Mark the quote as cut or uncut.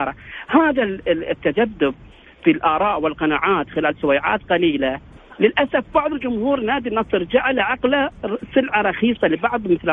uncut